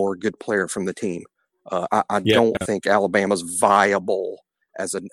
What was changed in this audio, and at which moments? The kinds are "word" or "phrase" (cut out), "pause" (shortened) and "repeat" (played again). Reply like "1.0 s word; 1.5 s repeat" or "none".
none